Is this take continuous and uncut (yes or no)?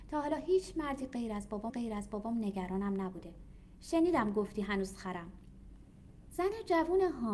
no